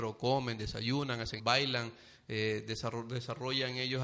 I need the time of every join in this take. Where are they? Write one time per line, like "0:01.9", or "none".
0:01.4